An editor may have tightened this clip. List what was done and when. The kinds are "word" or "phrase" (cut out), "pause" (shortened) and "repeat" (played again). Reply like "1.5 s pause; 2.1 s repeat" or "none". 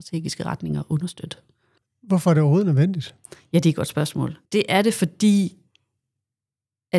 1.8 s pause; 4.5 s pause